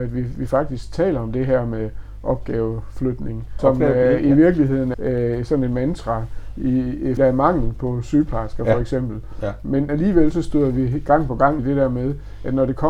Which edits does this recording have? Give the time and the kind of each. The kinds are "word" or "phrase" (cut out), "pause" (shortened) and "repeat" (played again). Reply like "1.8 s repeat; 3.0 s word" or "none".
3.6 s word; 4.9 s word; 7.2 s word; 9.9 s word; 11.6 s word